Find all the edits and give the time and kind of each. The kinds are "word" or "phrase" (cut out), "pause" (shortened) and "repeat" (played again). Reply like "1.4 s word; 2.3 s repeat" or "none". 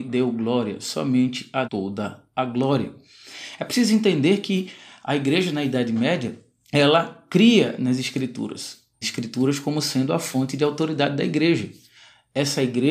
1.6 s word; 9.0 s phrase